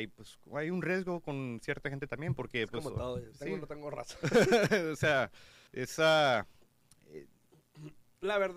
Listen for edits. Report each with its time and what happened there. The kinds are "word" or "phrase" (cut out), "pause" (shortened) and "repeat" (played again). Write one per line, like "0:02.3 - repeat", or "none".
0:05.7 - pause